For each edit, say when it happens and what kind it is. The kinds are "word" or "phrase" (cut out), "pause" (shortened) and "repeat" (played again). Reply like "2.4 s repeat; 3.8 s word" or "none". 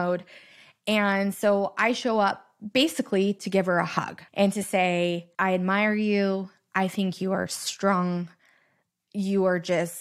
4.3 s pause; 5.3 s pause